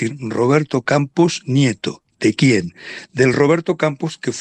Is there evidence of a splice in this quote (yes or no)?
no